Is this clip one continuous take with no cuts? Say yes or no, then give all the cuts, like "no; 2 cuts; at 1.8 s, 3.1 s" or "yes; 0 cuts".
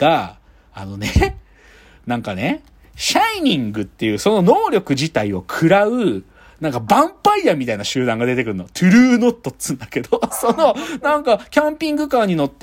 yes; 0 cuts